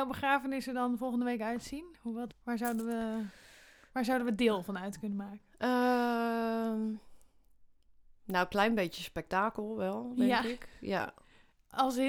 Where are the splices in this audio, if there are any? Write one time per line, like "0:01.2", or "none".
0:02.3